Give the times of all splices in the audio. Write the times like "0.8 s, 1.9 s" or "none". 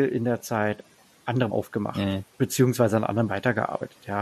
1.5 s, 2.3 s, 3.3 s